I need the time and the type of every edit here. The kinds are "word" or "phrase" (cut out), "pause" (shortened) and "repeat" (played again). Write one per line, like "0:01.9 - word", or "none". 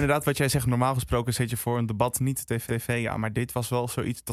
0:02.7 - repeat

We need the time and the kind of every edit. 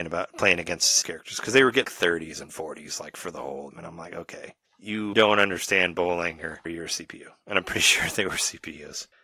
0:01.0 - word
0:01.8 - word
0:03.7 - word
0:05.1 - word
0:06.7 - word

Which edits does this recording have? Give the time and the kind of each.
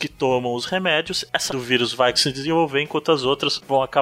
0:01.5 - word
0:02.2 - word

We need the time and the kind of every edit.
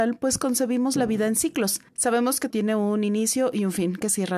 0:01.9 - pause
0:02.5 - word

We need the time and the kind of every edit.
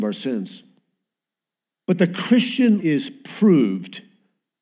0:02.8 - word

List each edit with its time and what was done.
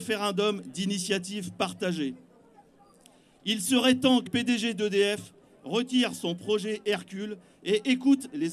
0:04.3 - word

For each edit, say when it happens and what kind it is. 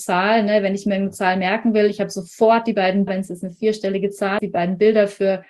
0:03.1 - word
0:04.4 - word

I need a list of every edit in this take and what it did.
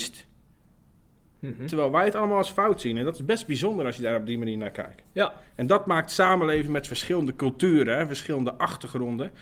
none

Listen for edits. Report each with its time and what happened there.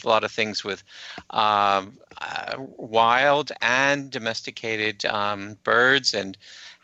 none

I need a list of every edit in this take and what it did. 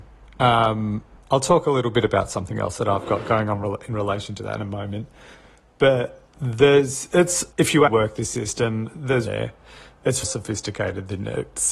0:01.2 - pause
0:06.3 - pause
0:07.5 - pause
0:07.9 - word
0:09.3 - phrase
0:10.2 - phrase

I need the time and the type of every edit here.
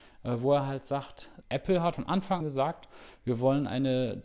0:01.4 - word
0:01.9 - word
0:02.4 - word

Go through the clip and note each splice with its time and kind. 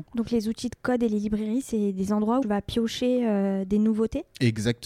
0:02.4 - phrase

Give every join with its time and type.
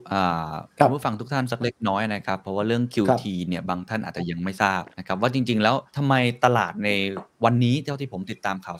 0:04.9 - pause
0:05.9 - pause

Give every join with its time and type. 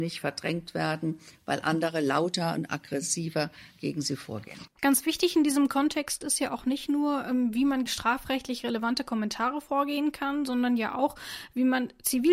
0:07.9 - word

